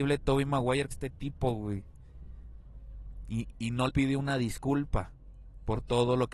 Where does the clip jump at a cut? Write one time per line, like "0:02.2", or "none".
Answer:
0:00.9
0:03.5
0:03.9